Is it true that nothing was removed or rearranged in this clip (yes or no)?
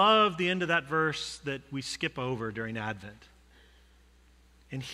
yes